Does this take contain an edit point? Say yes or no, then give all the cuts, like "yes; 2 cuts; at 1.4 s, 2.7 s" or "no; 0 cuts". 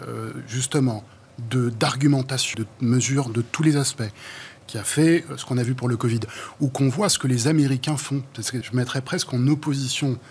yes; 2 cuts; at 2.5 s, 8.6 s